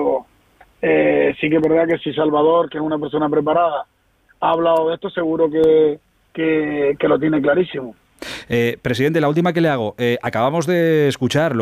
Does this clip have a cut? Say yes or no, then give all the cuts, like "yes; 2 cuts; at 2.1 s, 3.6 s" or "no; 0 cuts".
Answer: no; 0 cuts